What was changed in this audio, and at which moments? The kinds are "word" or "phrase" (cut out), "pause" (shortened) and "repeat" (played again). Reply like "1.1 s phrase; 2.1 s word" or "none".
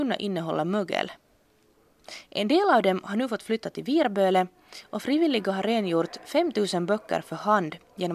none